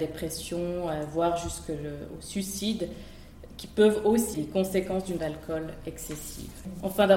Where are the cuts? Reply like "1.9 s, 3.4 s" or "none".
4.3 s, 5.2 s

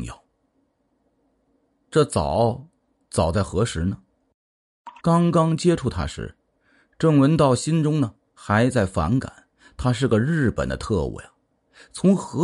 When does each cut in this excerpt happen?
5.0 s

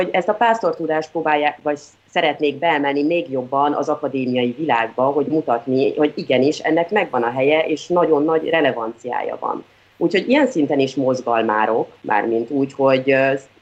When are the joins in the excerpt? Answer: none

